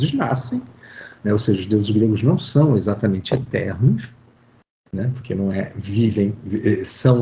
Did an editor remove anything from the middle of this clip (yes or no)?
no